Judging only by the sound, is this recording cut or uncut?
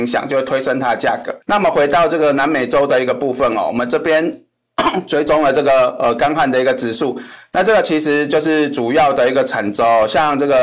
cut